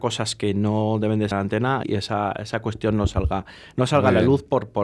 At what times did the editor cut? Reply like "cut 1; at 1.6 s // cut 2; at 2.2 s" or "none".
cut 1; at 1.3 s // cut 2; at 1.8 s

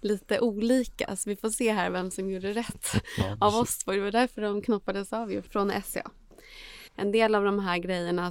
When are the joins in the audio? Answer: cut 1; at 6.9 s

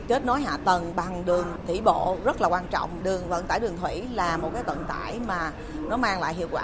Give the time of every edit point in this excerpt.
cut 1; at 3.0 s

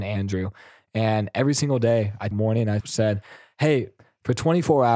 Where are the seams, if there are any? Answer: cut 1; at 2.3 s // cut 2; at 2.8 s

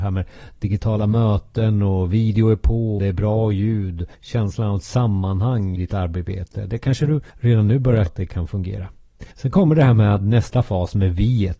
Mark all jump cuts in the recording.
cut 1; at 3.0 s // cut 2; at 4.1 s // cut 3; at 5.8 s // cut 4; at 7.3 s // cut 5; at 8.1 s // cut 6; at 9.3 s

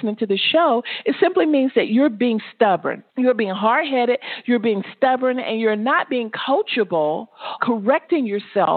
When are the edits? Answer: cut 1; at 3.1 s // cut 2; at 7.6 s

